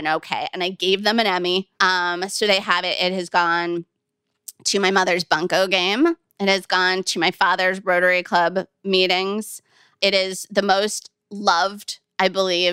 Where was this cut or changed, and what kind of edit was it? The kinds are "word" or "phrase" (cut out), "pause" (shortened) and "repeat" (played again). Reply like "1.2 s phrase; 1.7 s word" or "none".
1.7 s pause